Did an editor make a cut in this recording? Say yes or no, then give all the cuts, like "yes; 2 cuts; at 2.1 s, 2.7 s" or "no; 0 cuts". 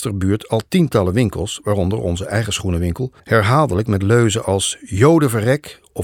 yes; 1 cut; at 3.2 s